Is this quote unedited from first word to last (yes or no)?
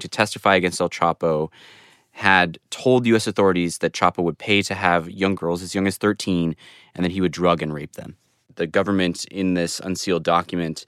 no